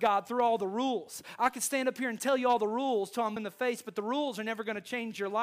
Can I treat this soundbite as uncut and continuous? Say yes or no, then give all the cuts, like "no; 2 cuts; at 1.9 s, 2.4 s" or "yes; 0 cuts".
no; 1 cut; at 3.4 s